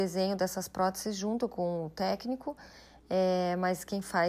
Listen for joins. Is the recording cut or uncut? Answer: uncut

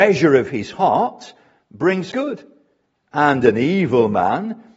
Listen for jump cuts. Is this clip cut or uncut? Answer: cut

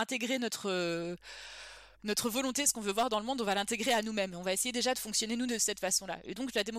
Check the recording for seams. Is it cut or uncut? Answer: cut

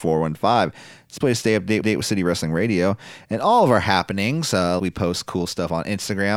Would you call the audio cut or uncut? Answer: cut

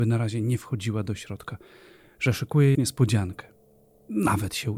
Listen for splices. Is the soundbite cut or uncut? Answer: cut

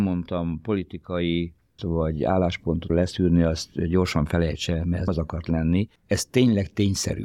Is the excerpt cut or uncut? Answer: cut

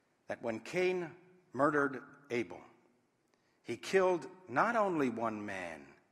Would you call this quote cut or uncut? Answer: uncut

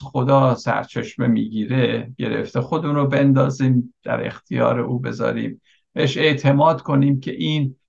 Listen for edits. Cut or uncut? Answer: uncut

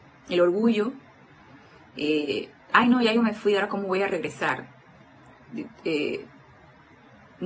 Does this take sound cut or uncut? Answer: uncut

